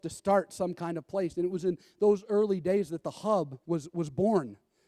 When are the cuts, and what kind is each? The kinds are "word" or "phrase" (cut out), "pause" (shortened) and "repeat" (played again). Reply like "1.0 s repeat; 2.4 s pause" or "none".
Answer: 3.6 s pause